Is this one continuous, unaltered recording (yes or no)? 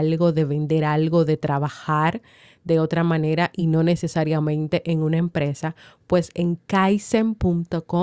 yes